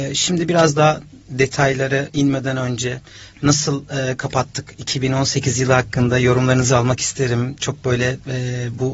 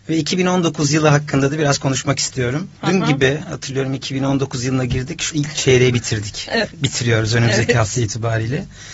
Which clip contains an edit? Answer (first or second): second